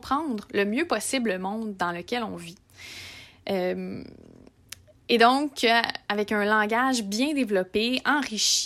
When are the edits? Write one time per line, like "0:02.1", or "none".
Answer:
none